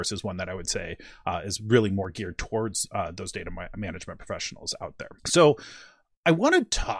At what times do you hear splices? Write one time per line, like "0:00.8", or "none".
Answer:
0:05.2